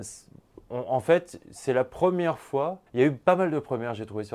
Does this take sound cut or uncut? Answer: cut